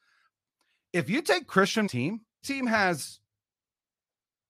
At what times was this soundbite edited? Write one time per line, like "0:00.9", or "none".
0:01.9
0:02.4